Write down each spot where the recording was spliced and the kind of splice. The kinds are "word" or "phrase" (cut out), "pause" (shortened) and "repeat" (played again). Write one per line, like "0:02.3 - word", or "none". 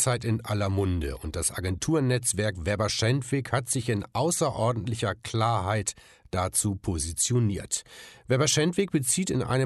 none